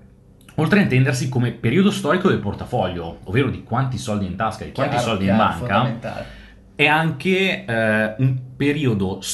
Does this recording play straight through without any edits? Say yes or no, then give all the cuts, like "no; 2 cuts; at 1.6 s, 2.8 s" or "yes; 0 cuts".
no; 1 cut; at 2.4 s